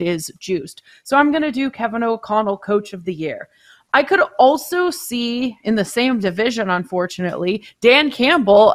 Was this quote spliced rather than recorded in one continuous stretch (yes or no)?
no